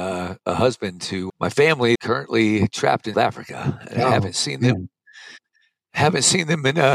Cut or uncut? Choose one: cut